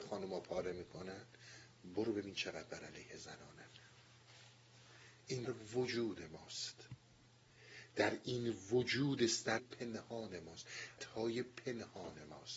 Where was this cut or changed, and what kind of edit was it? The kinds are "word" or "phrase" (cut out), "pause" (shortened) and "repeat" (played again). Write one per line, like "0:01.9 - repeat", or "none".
0:05.4 - word
0:09.6 - word
0:11.0 - word